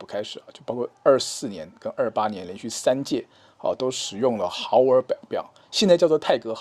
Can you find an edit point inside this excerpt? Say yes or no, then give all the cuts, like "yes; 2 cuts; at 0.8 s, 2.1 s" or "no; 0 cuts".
no; 0 cuts